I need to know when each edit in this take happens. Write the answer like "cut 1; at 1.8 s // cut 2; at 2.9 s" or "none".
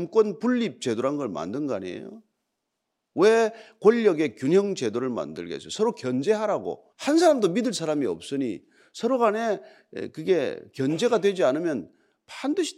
cut 1; at 6.9 s